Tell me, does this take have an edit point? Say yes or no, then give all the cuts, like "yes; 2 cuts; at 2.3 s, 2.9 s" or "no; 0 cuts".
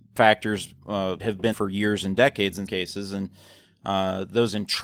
yes; 3 cuts; at 1.2 s, 1.5 s, 2.7 s